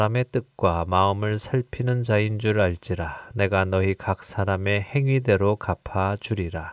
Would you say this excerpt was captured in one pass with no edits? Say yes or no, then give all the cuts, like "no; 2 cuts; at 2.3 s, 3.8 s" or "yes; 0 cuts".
yes; 0 cuts